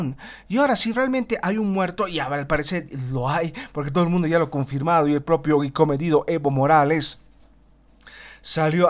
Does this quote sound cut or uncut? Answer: uncut